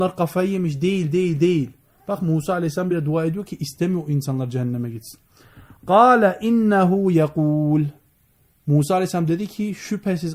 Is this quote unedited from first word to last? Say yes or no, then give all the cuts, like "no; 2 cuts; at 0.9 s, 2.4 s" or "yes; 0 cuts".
yes; 0 cuts